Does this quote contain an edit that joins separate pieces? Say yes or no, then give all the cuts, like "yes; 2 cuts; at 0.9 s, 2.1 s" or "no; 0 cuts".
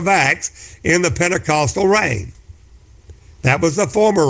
no; 0 cuts